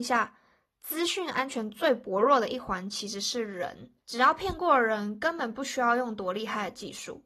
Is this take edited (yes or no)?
yes